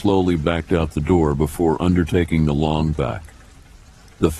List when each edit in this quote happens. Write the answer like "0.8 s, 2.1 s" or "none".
2.9 s